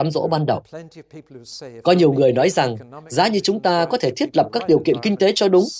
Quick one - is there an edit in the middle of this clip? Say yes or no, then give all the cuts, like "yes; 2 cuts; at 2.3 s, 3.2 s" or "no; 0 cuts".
no; 0 cuts